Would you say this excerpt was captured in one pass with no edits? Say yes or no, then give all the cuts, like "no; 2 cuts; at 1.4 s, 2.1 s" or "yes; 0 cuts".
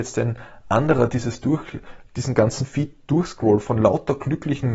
yes; 0 cuts